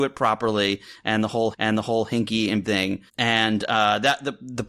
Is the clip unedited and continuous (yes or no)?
no